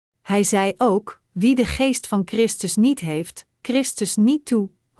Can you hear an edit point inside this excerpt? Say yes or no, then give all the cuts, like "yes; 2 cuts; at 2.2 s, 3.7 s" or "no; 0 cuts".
yes; 2 cuts; at 1.2 s, 3.6 s